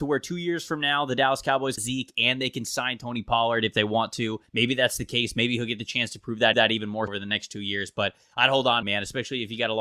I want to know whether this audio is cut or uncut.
cut